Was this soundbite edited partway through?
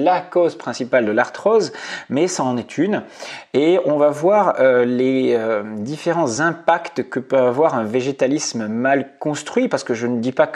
no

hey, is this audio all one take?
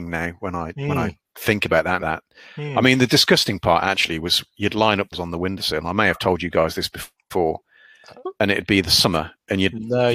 no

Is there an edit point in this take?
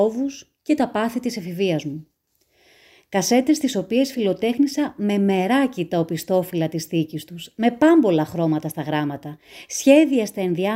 no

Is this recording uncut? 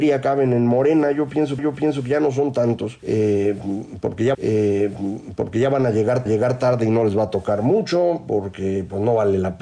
no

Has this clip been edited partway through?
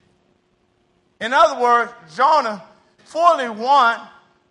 yes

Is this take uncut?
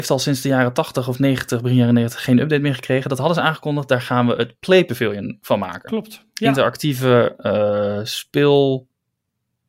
yes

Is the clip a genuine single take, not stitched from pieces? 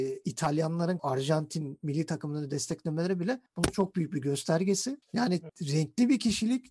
no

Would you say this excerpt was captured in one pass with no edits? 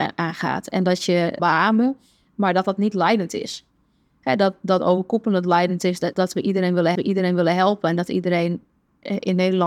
no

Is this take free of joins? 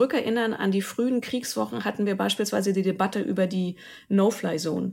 yes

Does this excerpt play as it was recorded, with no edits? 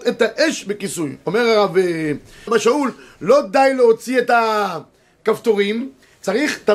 no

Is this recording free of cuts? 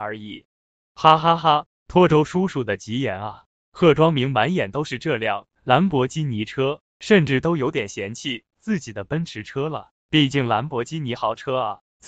no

